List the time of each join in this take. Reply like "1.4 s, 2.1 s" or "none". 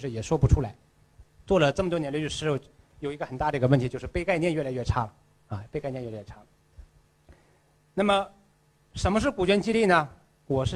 none